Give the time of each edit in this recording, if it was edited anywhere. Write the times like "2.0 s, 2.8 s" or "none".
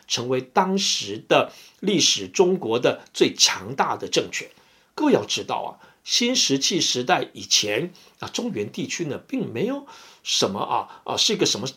none